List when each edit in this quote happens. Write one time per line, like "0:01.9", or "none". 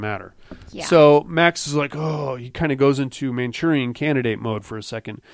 none